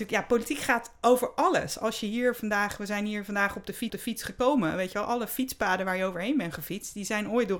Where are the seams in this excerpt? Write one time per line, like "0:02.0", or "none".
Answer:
0:03.9